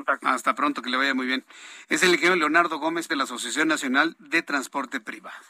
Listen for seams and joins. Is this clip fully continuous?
no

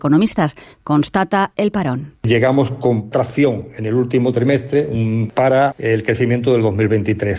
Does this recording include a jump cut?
yes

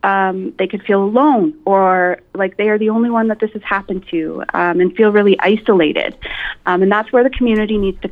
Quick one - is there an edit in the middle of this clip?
no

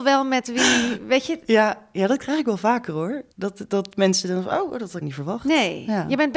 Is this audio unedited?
no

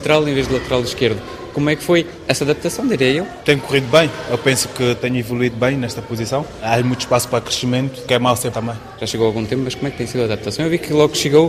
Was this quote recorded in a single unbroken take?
no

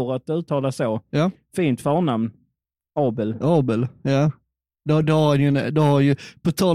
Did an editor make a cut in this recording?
yes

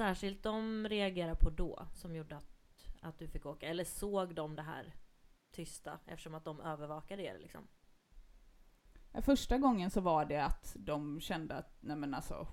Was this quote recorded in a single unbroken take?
yes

